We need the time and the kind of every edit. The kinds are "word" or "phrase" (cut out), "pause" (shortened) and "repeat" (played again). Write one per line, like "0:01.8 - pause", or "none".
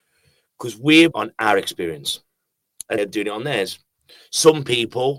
0:01.1 - phrase
0:03.0 - word